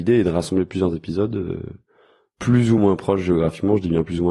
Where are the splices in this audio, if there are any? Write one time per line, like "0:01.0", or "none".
none